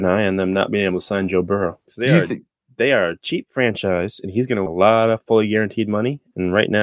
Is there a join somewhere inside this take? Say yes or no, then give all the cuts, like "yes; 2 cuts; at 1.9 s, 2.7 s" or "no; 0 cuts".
yes; 1 cut; at 4.7 s